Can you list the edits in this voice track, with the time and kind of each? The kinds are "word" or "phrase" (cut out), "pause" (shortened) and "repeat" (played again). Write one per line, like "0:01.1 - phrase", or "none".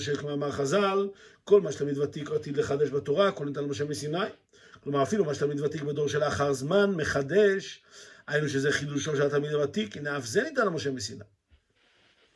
none